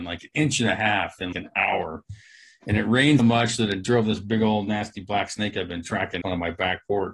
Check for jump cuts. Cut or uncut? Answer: cut